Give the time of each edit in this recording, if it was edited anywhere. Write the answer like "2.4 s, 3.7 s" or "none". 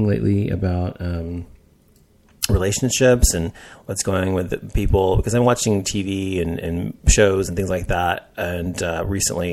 none